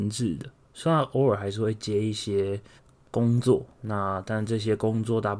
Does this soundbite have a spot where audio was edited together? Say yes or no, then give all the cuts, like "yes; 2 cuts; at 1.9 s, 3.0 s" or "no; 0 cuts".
yes; 2 cuts; at 2.8 s, 3.7 s